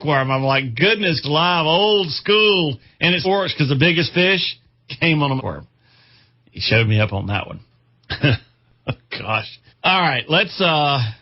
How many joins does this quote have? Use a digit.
5